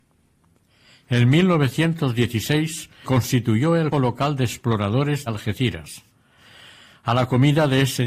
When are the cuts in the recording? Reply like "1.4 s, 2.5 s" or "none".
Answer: 3.0 s, 3.9 s, 5.3 s